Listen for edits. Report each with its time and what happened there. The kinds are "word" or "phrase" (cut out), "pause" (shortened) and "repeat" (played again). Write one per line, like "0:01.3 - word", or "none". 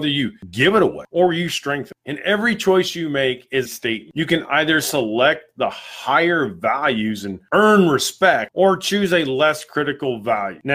0:03.7 - word